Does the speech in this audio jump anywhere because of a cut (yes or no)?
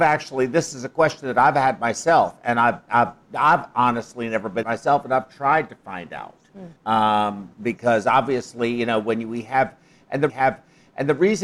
yes